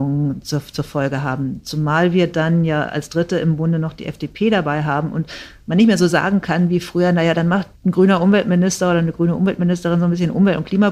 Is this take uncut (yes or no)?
no